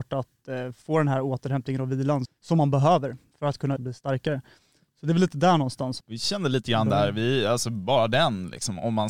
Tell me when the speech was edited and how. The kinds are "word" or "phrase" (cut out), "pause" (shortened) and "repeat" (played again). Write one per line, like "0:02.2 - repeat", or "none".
0:02.2 - word
0:03.8 - word
0:06.0 - word